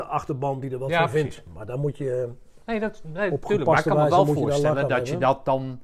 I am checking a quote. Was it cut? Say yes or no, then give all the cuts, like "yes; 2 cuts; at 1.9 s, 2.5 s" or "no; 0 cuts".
no; 0 cuts